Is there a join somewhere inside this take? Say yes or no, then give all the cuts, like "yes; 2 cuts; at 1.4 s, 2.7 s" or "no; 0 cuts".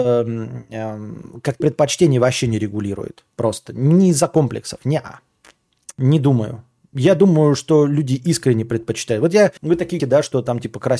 yes; 3 cuts; at 1.6 s, 9.6 s, 10.0 s